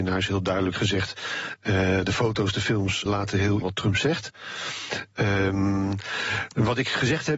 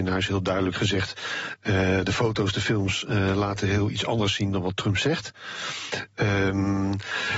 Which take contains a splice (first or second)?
first